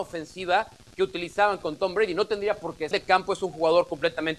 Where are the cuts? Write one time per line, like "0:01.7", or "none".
0:02.9